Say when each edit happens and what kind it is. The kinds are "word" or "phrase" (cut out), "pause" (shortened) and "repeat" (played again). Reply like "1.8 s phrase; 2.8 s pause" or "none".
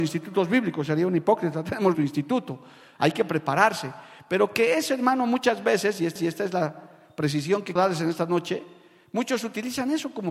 1.9 s word; 6.2 s repeat; 7.8 s word